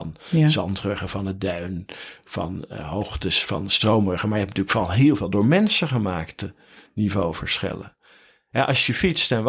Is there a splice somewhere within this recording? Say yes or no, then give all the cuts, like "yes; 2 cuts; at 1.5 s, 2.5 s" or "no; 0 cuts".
no; 0 cuts